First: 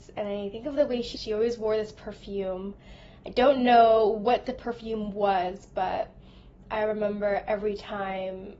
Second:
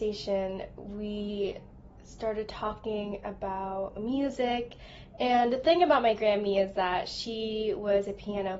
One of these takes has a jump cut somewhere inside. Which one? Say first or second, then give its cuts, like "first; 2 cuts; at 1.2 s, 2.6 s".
first; 1 cut; at 1.1 s